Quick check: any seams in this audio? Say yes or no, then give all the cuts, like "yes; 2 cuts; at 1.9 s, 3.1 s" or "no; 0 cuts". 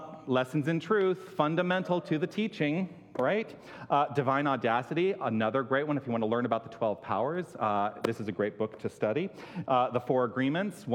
no; 0 cuts